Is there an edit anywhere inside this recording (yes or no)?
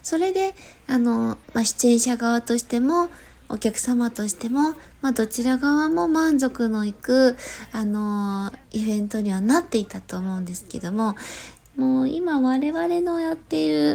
yes